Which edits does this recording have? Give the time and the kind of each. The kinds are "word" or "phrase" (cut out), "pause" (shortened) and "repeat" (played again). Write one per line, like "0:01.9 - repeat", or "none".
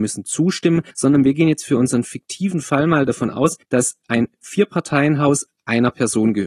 0:00.9 - pause
0:03.6 - pause